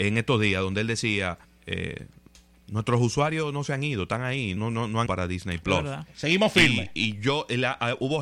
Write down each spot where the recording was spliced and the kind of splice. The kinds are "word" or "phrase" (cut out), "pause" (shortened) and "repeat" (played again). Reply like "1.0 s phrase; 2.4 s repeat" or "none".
1.4 s pause; 4.6 s word; 5.1 s word

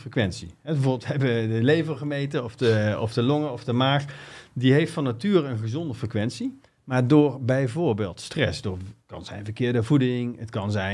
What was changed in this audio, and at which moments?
9.0 s pause

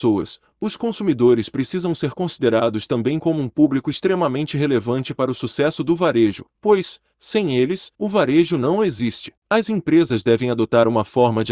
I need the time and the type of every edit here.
6.5 s pause; 7.9 s pause; 9.4 s pause

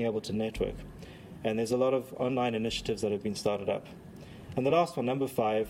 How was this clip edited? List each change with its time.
none

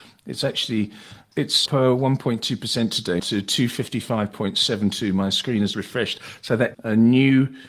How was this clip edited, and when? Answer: 1.7 s word; 3.2 s word; 5.7 s word; 6.7 s word

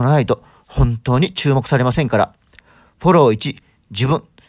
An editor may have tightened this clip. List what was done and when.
none

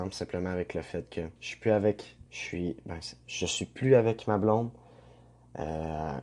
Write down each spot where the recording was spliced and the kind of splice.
1.4 s pause; 2.3 s pause

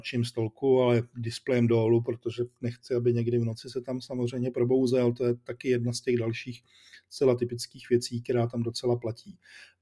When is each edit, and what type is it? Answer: none

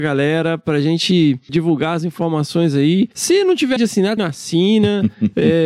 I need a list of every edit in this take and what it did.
1.5 s word; 3.8 s word; 4.2 s word

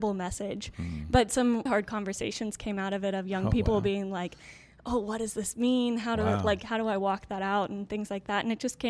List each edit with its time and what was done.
1.7 s word

